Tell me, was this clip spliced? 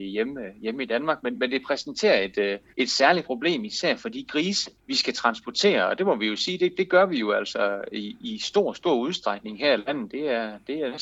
yes; 2 cuts; at 2.7 s, 4.8 s

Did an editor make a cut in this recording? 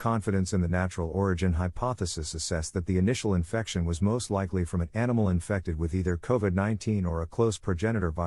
no; 0 cuts

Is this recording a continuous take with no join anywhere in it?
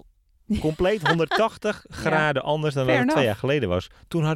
yes; 0 cuts

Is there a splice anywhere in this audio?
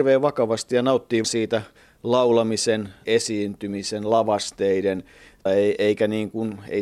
yes; 3 cuts; at 1.2 s, 3.1 s, 5.5 s

